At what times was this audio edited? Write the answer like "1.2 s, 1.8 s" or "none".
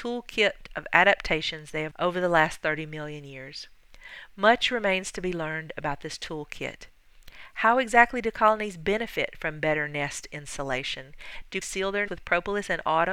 1.9 s, 11.6 s, 12.1 s